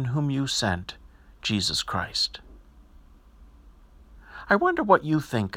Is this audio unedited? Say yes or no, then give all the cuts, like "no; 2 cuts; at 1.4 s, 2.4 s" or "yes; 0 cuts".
yes; 0 cuts